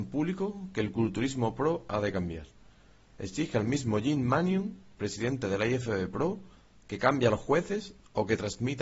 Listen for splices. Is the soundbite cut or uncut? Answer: uncut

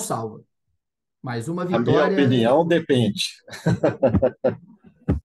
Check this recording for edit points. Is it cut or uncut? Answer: uncut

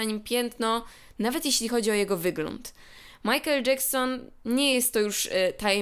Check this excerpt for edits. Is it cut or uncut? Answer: uncut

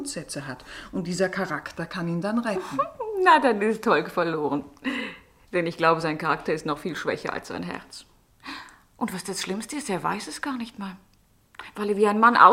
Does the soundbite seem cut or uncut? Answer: uncut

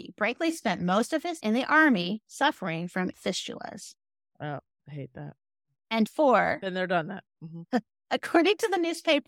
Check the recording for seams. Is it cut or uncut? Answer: cut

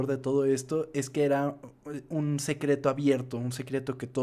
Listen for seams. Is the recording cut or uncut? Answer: uncut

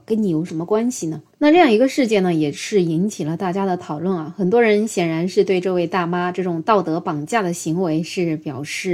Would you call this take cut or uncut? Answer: cut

